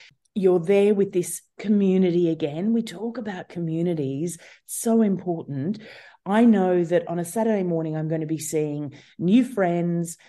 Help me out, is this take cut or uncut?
uncut